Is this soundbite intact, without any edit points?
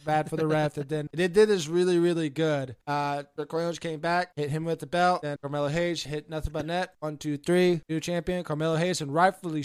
no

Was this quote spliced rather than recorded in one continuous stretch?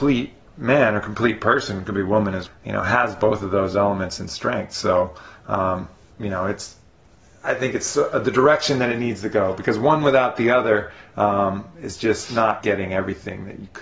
yes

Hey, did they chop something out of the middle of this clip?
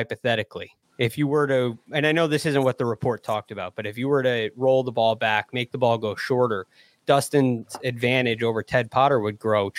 no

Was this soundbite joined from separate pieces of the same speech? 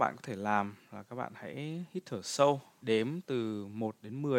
yes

